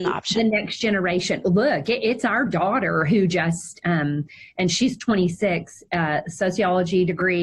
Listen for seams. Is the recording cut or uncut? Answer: uncut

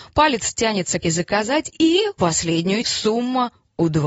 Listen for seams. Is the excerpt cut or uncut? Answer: cut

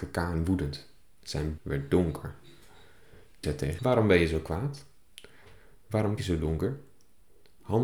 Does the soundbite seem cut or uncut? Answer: cut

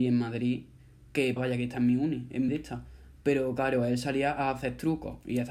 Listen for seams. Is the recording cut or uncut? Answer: cut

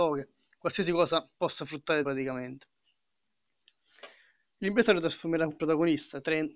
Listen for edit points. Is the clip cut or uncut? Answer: cut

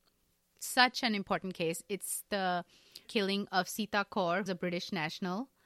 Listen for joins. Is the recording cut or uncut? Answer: cut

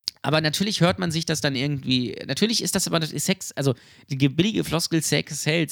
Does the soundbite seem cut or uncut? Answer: uncut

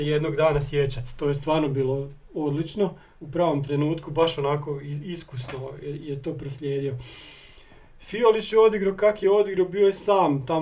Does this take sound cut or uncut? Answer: uncut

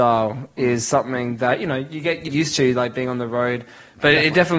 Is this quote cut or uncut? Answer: cut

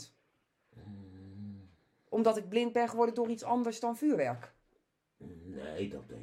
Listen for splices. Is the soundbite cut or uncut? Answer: uncut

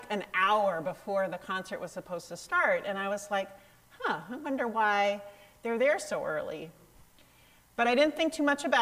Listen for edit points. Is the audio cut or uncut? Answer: uncut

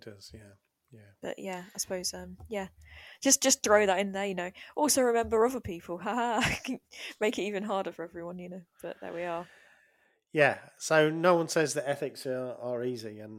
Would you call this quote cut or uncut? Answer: uncut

